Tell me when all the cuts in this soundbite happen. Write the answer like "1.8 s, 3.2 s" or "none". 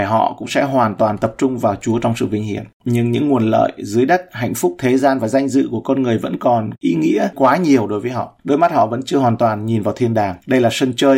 7.3 s